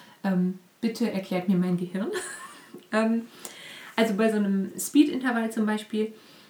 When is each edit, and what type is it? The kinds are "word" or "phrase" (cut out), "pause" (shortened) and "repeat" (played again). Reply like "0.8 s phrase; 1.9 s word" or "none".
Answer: none